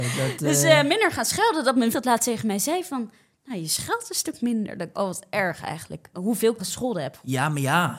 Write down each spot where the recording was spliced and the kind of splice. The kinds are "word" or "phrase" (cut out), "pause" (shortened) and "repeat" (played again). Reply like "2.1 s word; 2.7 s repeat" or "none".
1.9 s word; 4.9 s word; 6.6 s word